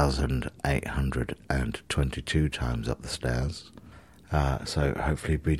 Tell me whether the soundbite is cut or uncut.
cut